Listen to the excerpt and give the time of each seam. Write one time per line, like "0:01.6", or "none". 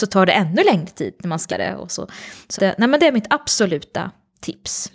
0:01.5
0:02.6